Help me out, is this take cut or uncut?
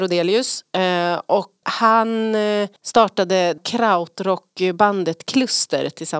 cut